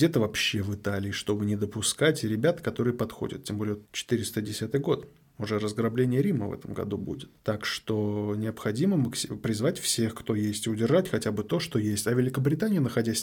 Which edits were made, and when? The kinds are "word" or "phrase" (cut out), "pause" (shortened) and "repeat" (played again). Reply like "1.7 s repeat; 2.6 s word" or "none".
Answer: 3.8 s pause; 7.4 s pause